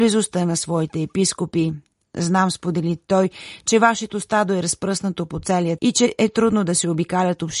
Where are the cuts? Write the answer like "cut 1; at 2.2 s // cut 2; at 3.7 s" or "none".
cut 1; at 5.8 s